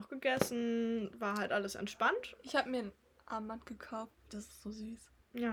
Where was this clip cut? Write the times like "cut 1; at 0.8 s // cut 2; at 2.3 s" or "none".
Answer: none